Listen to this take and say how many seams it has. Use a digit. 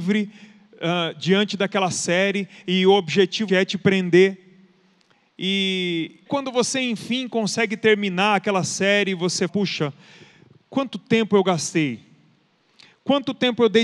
3